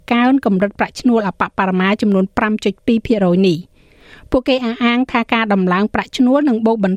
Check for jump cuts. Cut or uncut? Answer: uncut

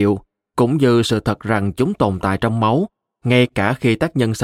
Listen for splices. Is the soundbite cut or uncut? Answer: uncut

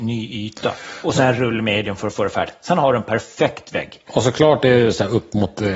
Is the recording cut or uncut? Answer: uncut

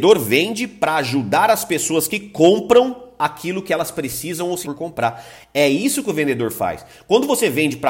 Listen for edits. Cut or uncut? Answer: cut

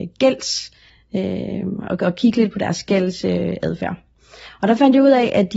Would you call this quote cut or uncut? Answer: uncut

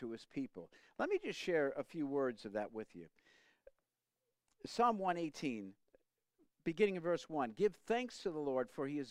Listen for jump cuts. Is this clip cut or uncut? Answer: uncut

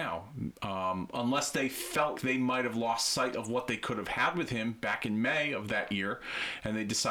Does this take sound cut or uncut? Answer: cut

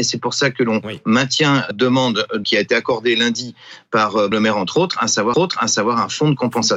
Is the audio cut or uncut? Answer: cut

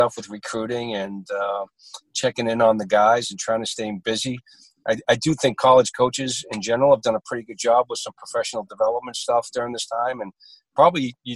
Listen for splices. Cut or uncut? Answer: uncut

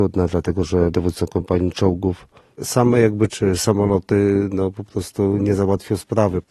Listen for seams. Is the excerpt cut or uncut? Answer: cut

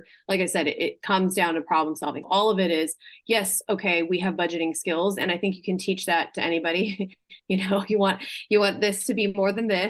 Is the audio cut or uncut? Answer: cut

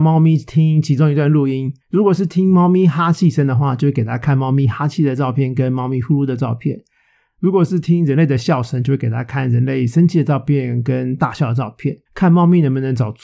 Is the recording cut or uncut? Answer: cut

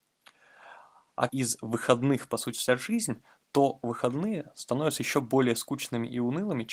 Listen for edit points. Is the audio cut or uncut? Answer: cut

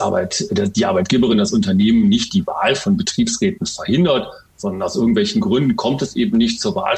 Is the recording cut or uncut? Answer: uncut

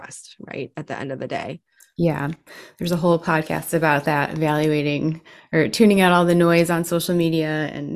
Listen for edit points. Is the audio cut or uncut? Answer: uncut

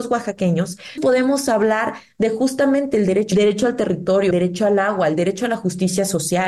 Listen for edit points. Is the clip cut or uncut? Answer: cut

